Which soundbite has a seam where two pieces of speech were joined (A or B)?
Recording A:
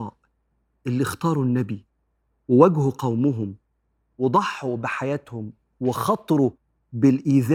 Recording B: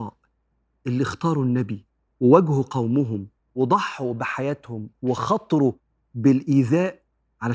B